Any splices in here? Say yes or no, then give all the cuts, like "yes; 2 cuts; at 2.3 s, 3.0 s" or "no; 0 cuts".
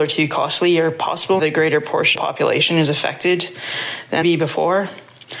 yes; 3 cuts; at 1.4 s, 2.1 s, 4.2 s